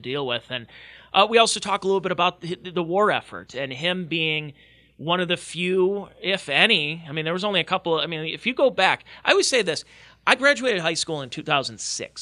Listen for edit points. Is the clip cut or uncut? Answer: uncut